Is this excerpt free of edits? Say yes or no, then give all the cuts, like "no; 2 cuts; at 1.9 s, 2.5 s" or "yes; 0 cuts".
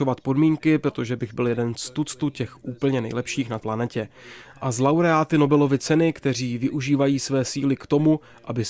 no; 1 cut; at 3.6 s